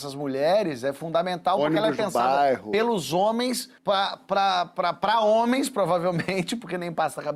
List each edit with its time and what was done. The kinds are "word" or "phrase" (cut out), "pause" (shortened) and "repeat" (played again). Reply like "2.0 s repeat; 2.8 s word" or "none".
3.8 s pause

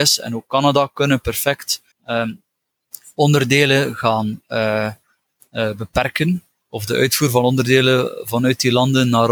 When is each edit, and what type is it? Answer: 1.9 s pause

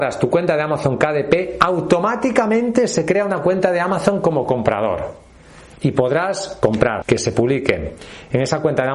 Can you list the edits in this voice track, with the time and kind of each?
7.0 s phrase

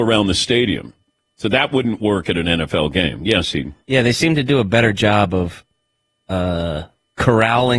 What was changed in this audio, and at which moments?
none

